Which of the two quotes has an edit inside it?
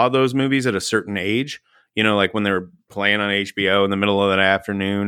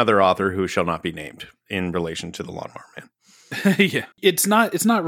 second; 1 cut; at 4.1 s

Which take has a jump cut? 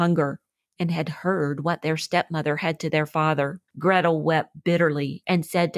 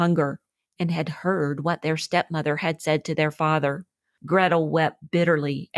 first; 2 cuts; at 2.8 s, 3.7 s

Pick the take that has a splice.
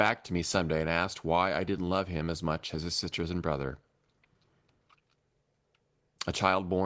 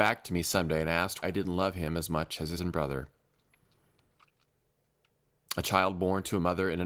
second; 2 cuts; at 1.2 s, 2.6 s

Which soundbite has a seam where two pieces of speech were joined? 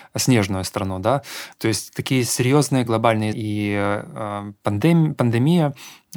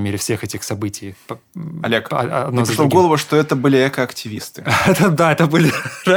first; 4 cuts; at 1.5 s, 1.9 s, 2.9 s, 3.3 s

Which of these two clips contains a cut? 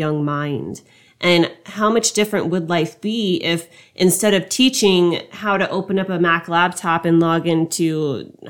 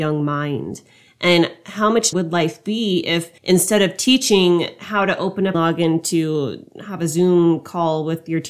second; 3 cuts; at 2.1 s, 3.4 s, 5.5 s

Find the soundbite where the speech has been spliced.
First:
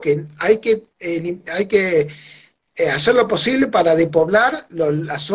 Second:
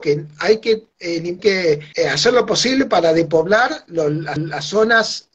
second; 3 cuts; at 1.4 s, 1.9 s, 4.4 s

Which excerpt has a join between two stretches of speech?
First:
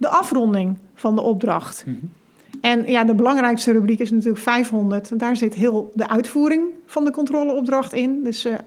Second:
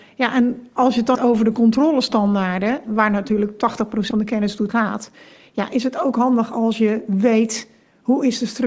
second; 4 cuts; at 1.1 s, 2.9 s, 4.1 s, 4.7 s

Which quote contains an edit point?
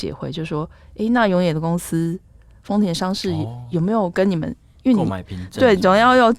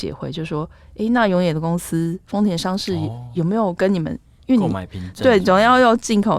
second; 1 cut; at 2.2 s

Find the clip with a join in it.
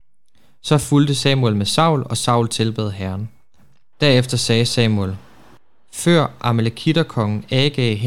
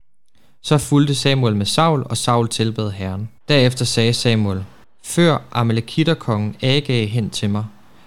second; 2 cuts; at 3.4 s, 4.8 s

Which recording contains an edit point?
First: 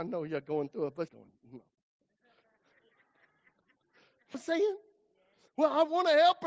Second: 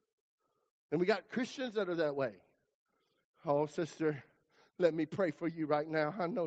first; 2 cuts; at 1.1 s, 4.3 s

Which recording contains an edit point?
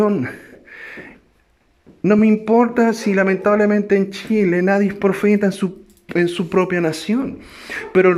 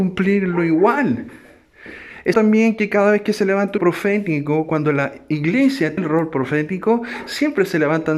second; 3 cuts; at 2.3 s, 3.8 s, 6.0 s

